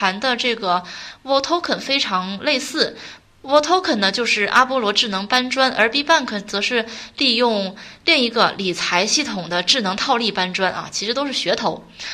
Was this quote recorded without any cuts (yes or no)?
yes